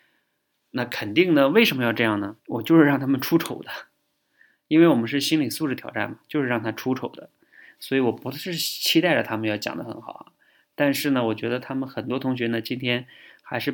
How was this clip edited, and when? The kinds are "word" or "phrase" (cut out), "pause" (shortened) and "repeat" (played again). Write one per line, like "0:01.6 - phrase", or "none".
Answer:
0:02.4 - pause